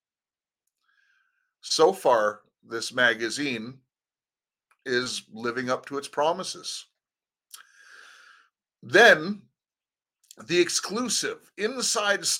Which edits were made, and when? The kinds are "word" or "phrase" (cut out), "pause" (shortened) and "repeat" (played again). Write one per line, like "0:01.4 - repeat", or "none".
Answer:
none